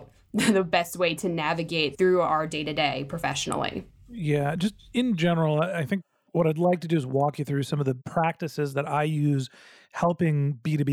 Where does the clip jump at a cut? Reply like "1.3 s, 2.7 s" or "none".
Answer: none

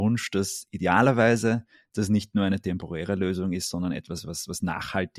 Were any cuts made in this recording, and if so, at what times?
none

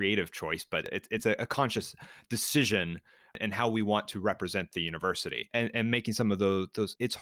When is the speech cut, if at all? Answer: none

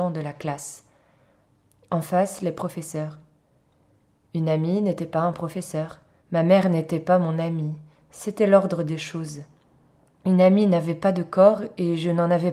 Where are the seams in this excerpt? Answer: none

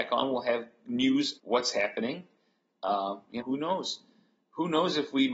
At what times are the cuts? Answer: 1.4 s, 3.4 s

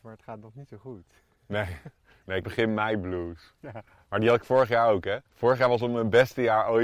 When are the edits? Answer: 2.4 s, 5.3 s

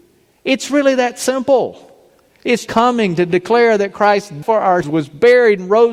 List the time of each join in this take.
2.7 s, 4.4 s, 4.8 s

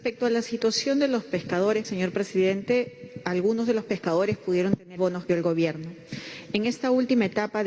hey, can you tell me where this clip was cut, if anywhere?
1.8 s, 5.0 s, 5.3 s

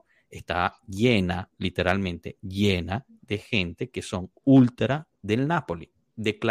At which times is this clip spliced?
5.2 s

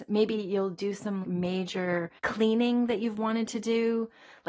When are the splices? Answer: 1.2 s, 2.2 s

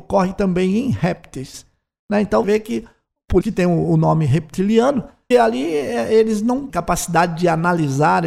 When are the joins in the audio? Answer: 2.4 s, 3.4 s, 5.3 s, 6.7 s

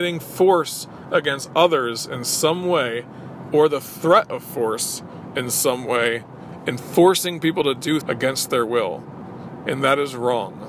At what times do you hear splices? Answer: 8.0 s

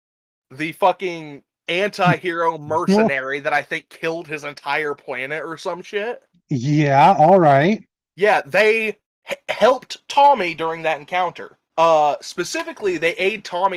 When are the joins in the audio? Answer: 6.3 s, 9.0 s, 11.7 s

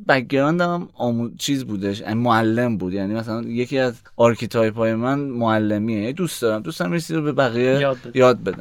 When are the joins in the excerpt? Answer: 4.1 s

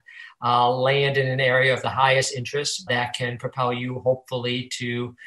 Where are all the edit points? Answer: 2.9 s

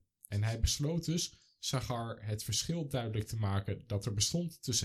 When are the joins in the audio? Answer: none

